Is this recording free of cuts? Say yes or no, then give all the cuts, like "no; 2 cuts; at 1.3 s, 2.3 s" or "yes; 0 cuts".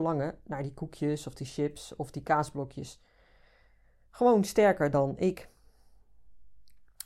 yes; 0 cuts